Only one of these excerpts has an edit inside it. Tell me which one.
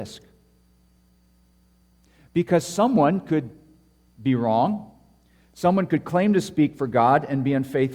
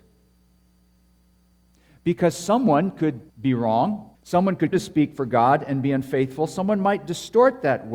second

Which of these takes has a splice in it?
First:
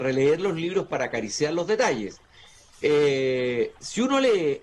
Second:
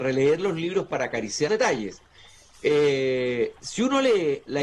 second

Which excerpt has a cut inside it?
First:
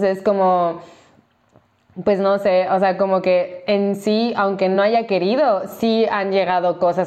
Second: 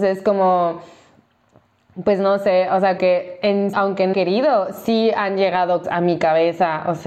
second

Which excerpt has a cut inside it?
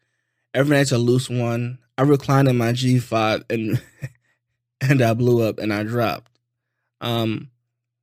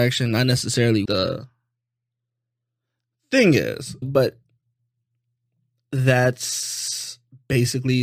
second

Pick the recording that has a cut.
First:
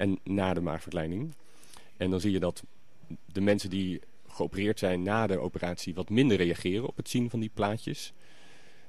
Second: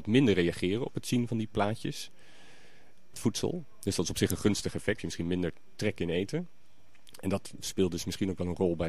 second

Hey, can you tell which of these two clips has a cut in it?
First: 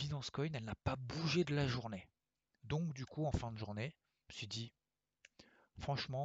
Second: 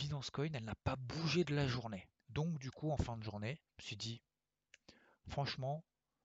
second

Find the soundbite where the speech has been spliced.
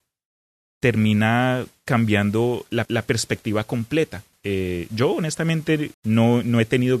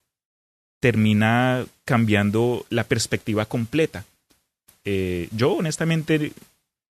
first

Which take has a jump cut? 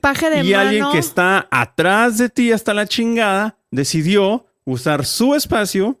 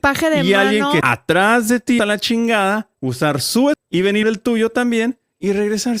second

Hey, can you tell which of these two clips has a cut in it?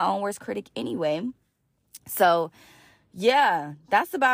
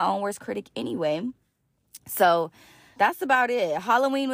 second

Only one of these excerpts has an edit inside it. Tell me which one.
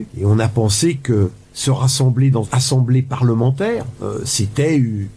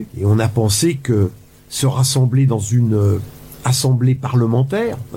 first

